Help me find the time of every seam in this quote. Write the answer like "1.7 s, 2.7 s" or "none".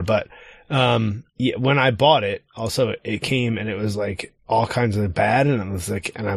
1.3 s, 4.4 s